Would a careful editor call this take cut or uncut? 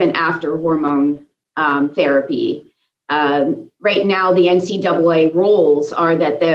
uncut